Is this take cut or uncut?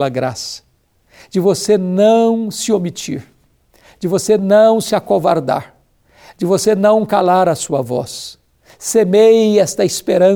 uncut